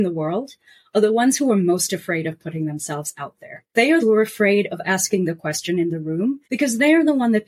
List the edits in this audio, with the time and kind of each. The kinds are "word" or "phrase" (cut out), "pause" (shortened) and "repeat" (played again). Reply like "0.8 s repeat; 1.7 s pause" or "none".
3.7 s pause; 4.0 s phrase; 6.4 s pause